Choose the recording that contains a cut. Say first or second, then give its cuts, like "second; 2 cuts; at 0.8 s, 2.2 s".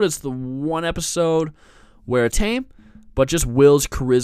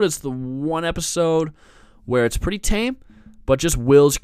first; 1 cut; at 2.3 s